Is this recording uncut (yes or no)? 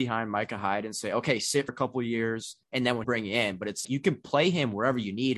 no